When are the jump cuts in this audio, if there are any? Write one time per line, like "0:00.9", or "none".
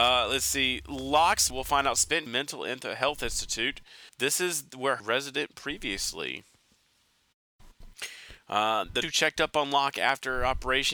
0:01.5
0:02.3
0:04.1
0:05.0
0:09.0